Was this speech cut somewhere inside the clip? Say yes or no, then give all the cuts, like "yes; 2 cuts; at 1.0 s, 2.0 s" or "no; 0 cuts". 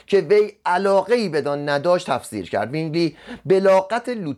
no; 0 cuts